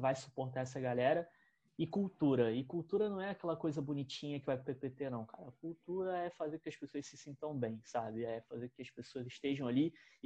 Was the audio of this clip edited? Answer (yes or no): no